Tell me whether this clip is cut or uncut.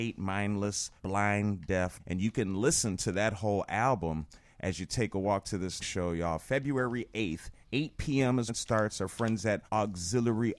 cut